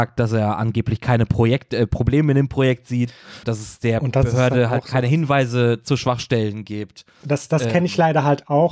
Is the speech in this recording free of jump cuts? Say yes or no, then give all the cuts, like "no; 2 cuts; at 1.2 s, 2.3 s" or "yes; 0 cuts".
no; 1 cut; at 3.4 s